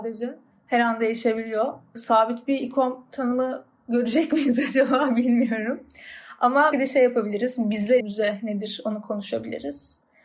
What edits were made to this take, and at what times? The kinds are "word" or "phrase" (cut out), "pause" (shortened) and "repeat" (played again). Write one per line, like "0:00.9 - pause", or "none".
0:06.7 - word
0:08.0 - word